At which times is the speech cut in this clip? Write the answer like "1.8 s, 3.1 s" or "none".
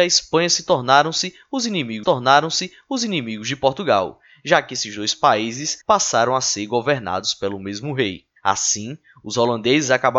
2.0 s, 5.8 s, 8.4 s